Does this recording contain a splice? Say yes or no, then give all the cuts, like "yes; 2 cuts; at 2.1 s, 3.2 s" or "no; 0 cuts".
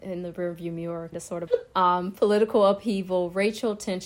yes; 2 cuts; at 1.1 s, 1.5 s